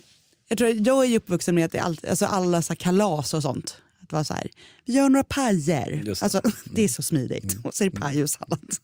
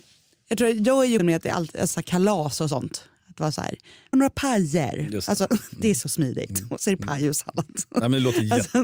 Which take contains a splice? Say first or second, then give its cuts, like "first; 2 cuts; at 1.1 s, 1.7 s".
second; 3 cuts; at 1.2 s, 1.9 s, 4.1 s